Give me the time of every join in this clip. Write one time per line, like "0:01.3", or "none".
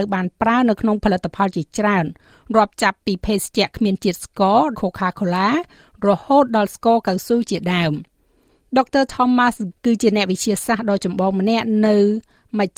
0:04.7
0:09.7